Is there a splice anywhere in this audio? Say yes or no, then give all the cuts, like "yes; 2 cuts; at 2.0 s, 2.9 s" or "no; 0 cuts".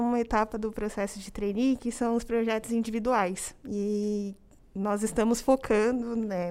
no; 0 cuts